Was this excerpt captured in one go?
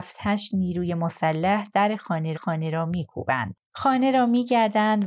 no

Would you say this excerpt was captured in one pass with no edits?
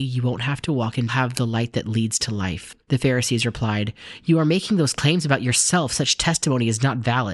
no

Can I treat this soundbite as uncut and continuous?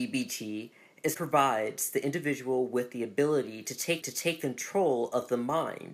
no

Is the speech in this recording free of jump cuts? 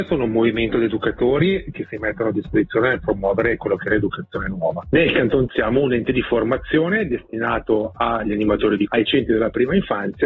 no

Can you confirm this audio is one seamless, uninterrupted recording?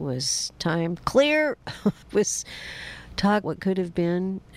no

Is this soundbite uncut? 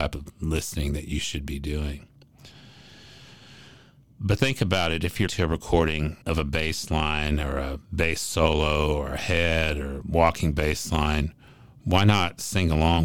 no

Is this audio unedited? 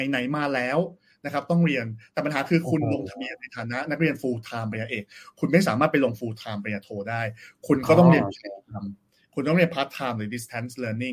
yes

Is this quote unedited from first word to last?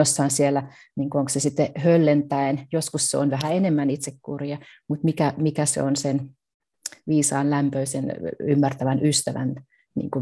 yes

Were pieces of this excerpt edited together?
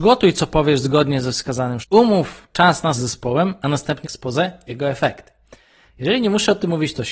yes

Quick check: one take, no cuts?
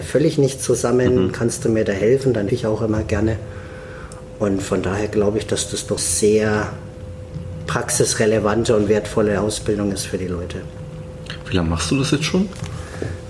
no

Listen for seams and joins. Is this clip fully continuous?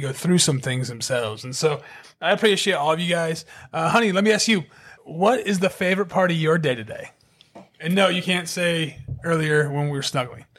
yes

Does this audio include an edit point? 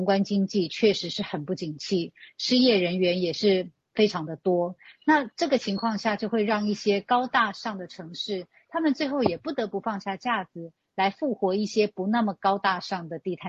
no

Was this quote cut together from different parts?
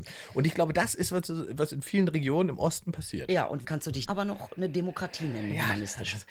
yes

